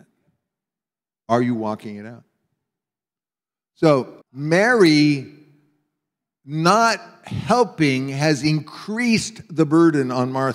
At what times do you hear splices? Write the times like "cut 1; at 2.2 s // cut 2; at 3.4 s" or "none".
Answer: cut 1; at 4.2 s